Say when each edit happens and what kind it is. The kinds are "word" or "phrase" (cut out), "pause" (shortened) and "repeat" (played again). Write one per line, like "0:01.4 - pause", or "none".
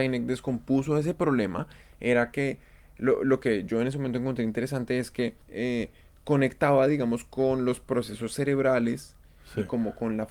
0:05.4 - pause